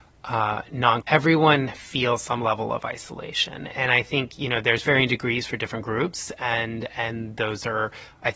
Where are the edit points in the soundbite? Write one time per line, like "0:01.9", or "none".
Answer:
0:01.0